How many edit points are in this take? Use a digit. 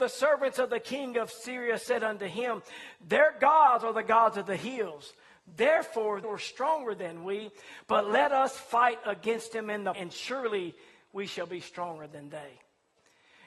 2